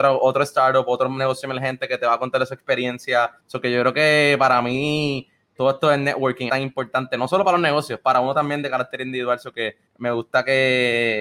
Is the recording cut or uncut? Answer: cut